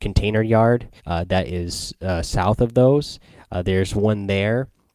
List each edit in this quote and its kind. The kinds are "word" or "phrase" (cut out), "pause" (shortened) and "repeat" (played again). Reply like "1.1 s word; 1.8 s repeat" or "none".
1.0 s pause